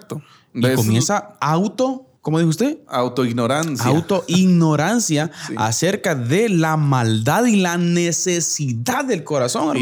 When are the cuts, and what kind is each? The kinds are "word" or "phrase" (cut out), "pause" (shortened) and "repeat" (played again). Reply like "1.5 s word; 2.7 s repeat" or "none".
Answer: 2.2 s pause